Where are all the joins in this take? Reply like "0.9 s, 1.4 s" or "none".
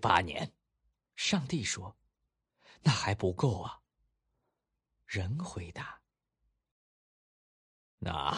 none